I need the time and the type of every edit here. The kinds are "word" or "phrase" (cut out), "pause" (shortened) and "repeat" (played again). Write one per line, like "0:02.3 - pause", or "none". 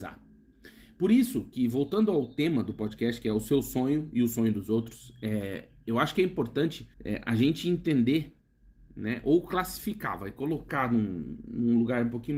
0:06.9 - pause